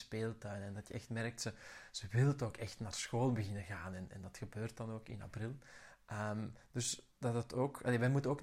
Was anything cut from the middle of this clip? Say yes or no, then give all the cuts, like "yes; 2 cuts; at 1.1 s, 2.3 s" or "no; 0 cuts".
yes; 1 cut; at 7.2 s